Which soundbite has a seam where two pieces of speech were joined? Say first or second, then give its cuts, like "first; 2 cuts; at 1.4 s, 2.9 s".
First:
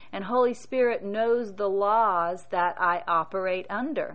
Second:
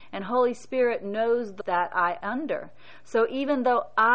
second; 2 cuts; at 1.6 s, 2.2 s